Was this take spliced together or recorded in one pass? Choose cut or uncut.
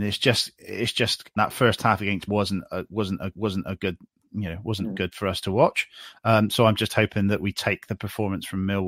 cut